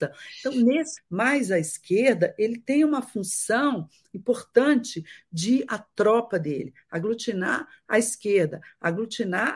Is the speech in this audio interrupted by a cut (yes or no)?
yes